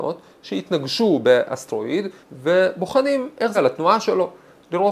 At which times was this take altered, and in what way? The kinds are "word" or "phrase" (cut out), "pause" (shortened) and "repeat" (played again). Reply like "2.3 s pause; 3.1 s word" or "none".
2.2 s pause; 3.5 s word